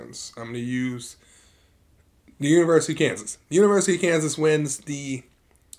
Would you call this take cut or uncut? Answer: uncut